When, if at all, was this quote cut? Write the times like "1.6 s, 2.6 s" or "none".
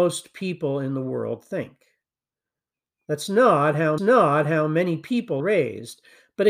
4.0 s, 5.4 s